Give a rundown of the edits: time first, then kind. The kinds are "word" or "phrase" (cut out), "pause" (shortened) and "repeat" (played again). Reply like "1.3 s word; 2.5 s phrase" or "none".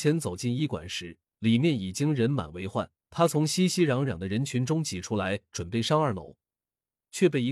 1.3 s pause; 3.0 s pause